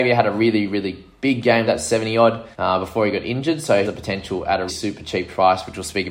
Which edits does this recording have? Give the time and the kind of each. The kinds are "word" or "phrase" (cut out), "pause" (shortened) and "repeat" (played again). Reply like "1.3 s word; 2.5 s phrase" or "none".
1.7 s phrase; 2.5 s pause; 3.8 s phrase; 4.7 s word

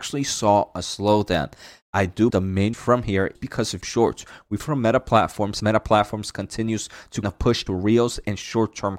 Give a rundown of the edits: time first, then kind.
2.3 s word; 2.7 s word; 3.3 s word; 3.8 s word; 4.6 s word; 5.6 s word; 7.2 s word; 7.7 s word

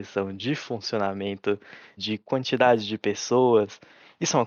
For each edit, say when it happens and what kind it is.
2.0 s word

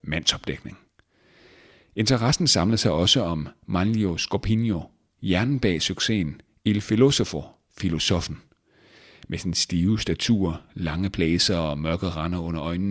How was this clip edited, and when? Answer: none

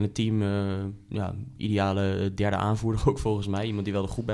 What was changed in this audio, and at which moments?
1.0 s pause

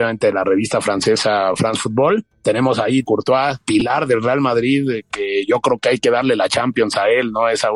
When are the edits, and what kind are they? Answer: 3.0 s phrase

